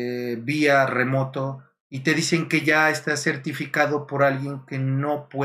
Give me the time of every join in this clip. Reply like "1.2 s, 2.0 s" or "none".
none